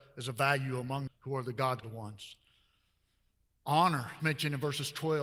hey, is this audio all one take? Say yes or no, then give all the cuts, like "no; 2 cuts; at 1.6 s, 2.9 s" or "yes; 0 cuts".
no; 3 cuts; at 1.1 s, 1.8 s, 4.2 s